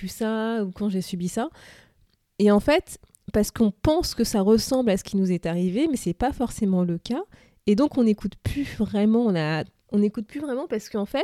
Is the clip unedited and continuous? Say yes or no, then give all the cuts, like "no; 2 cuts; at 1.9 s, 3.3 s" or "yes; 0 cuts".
yes; 0 cuts